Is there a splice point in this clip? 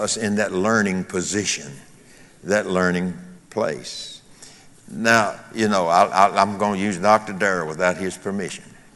yes; 1 cut; at 3.4 s

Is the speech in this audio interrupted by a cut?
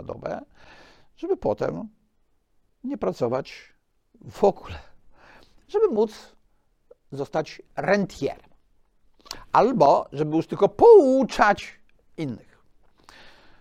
yes; 1 cut; at 7.7 s

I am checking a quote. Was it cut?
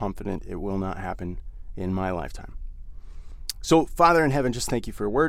no; 0 cuts

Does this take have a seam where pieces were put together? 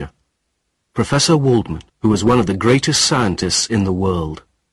yes; 1 cut; at 1.9 s

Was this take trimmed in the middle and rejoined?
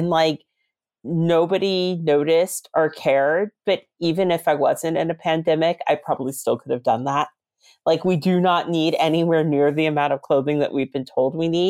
no; 0 cuts

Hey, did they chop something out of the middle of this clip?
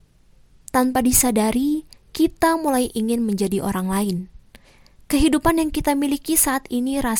no; 0 cuts

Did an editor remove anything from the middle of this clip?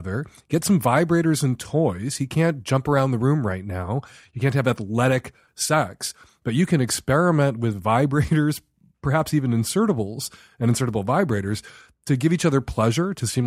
no; 0 cuts

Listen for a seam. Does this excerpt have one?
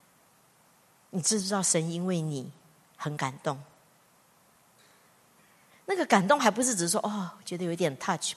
no; 0 cuts

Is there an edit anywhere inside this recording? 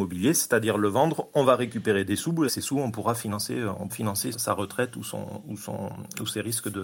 yes; 3 cuts; at 2.5 s, 3.9 s, 4.3 s

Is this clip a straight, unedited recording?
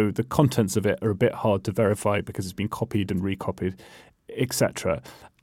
yes; 0 cuts

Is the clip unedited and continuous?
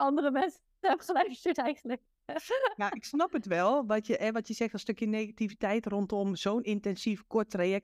yes; 0 cuts

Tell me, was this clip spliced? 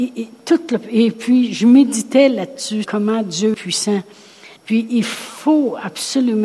yes; 3 cuts; at 2.8 s, 3.5 s, 4.6 s

